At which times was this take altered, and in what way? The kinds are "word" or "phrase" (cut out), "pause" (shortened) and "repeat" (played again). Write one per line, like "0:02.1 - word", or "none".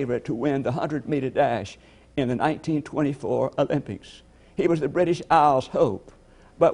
none